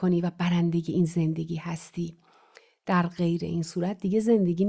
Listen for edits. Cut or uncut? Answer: uncut